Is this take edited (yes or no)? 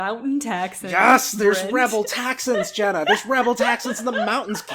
no